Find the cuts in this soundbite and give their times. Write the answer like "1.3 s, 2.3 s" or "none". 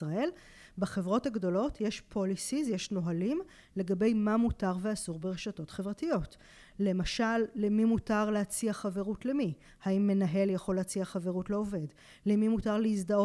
none